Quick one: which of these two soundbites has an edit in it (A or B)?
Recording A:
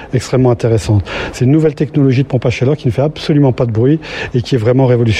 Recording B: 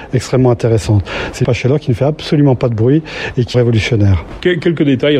B